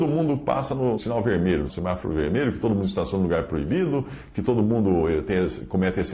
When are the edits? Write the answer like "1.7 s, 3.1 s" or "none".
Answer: 1.0 s, 1.7 s